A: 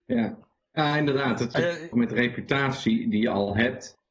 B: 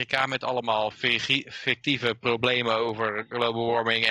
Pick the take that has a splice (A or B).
A